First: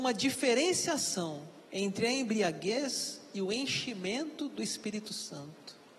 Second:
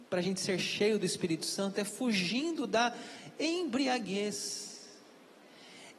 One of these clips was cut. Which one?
first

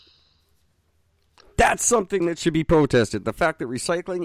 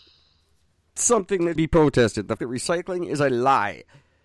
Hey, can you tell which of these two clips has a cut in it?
second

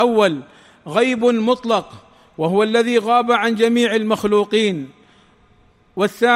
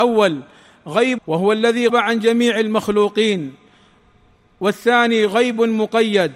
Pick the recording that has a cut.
second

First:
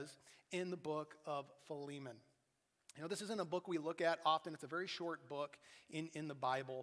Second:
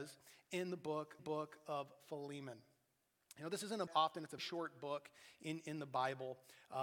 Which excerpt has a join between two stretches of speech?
second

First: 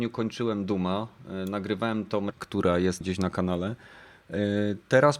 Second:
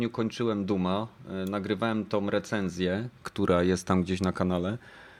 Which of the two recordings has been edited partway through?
first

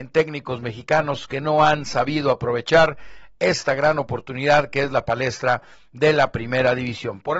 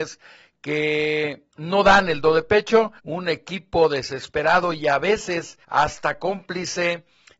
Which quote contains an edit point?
second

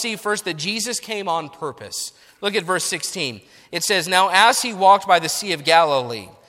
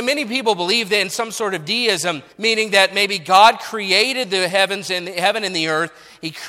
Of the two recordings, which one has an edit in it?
second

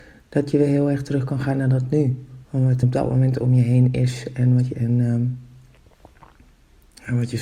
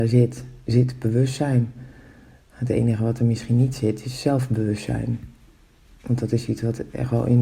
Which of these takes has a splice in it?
first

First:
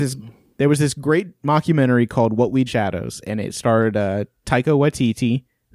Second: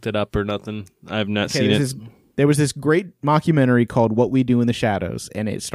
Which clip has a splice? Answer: first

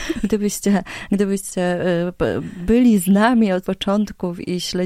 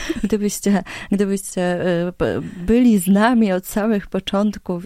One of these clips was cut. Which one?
first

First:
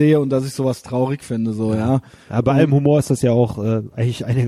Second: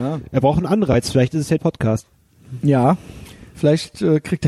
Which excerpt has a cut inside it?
second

